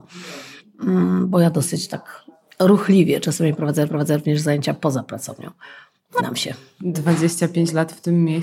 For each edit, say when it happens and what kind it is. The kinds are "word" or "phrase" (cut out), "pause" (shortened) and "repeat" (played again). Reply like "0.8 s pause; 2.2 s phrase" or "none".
3.9 s repeat; 6.2 s phrase